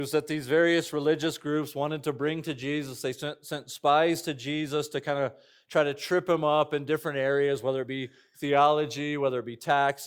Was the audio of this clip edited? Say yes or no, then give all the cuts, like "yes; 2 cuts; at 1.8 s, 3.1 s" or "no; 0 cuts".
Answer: no; 0 cuts